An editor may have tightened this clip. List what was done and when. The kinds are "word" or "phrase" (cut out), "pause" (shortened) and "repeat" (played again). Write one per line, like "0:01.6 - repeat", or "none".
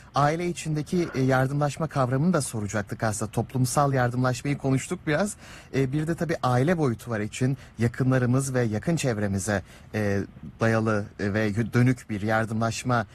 none